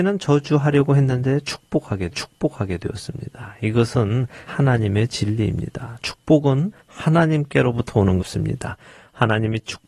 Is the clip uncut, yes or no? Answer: no